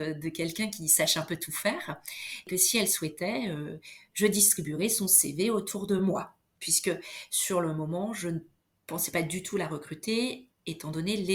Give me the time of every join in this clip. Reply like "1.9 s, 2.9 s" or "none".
none

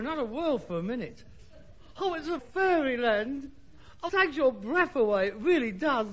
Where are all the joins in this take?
2.4 s, 4.1 s

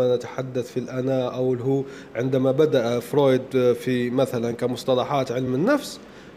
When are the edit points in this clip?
none

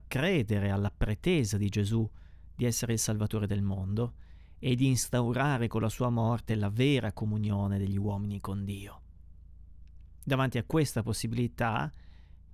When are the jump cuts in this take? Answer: none

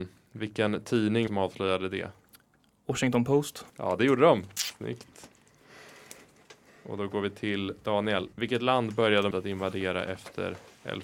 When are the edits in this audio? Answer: 1.3 s, 3.7 s, 6.7 s, 8.3 s, 9.3 s

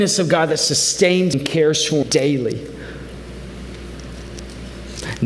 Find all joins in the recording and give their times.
1.3 s, 2.0 s

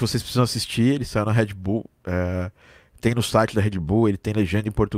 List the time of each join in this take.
none

